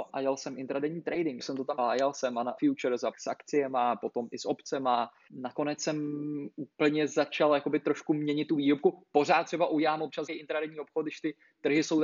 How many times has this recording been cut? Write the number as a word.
six